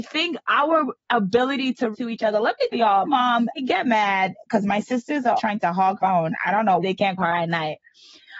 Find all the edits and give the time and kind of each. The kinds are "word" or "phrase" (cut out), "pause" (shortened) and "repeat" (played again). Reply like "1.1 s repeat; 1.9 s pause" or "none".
1.9 s word; 2.7 s word; 3.0 s word; 3.6 s word; 5.4 s word; 6.0 s word; 6.8 s word; 7.2 s word